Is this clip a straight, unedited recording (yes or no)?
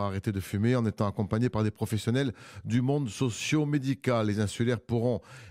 yes